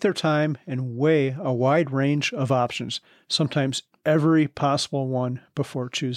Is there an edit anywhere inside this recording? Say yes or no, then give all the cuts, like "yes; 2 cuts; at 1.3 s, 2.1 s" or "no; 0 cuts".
no; 0 cuts